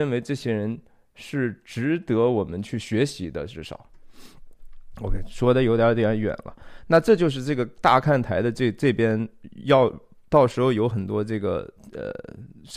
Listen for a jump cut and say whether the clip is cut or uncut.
uncut